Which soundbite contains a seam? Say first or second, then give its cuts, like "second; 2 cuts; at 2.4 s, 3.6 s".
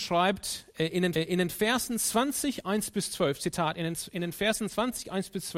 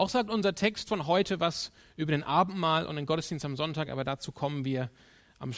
first; 1 cut; at 1.1 s